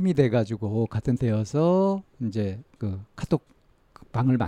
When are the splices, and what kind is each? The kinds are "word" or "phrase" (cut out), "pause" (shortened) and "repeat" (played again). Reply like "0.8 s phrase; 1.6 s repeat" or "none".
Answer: 1.2 s word; 2.7 s pause